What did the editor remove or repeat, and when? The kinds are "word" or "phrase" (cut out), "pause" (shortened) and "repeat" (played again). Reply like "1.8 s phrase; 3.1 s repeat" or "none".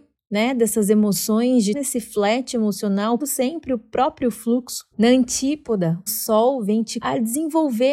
1.7 s word; 3.2 s word; 4.9 s pause; 6.1 s word; 7.0 s word